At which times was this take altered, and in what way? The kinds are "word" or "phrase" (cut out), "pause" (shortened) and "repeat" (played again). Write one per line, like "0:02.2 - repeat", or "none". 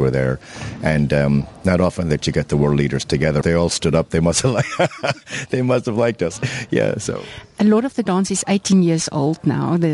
0:03.4 - phrase